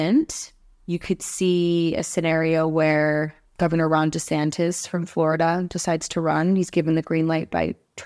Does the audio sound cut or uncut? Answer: uncut